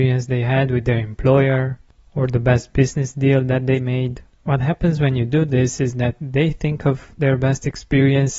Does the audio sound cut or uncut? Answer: uncut